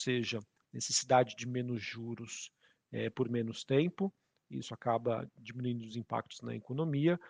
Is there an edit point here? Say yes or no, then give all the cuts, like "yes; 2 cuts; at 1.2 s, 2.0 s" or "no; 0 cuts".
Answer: no; 0 cuts